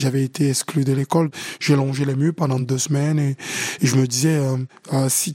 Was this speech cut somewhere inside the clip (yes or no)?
no